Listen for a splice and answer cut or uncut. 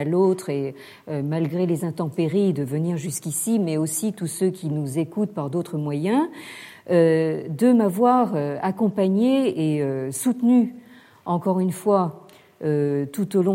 uncut